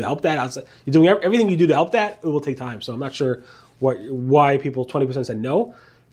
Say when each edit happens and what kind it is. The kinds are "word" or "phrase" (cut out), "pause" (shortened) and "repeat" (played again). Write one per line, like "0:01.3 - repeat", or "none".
none